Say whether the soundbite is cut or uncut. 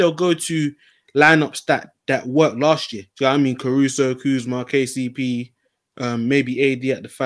cut